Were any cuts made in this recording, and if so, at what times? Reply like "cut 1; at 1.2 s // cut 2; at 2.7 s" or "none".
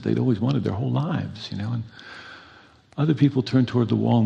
none